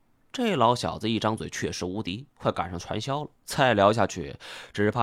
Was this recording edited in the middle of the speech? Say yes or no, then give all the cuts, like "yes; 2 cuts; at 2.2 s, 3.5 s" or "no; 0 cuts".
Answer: yes; 1 cut; at 3.4 s